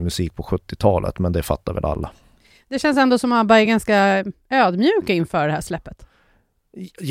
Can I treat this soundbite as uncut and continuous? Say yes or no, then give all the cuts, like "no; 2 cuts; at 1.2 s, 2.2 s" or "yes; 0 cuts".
yes; 0 cuts